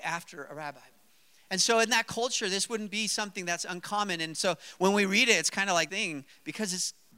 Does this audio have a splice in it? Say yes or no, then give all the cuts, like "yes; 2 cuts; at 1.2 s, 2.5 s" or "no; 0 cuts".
yes; 1 cut; at 5.9 s